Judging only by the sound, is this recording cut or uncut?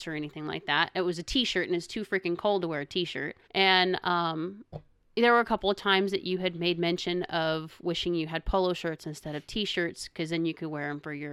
cut